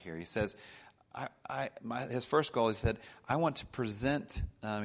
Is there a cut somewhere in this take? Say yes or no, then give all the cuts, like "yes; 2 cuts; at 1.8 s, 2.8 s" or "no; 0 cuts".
no; 0 cuts